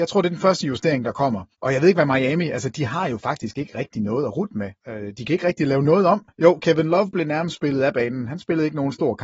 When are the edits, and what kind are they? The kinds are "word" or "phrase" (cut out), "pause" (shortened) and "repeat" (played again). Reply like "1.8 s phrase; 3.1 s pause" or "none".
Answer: 1.5 s pause; 4.8 s pause; 6.3 s pause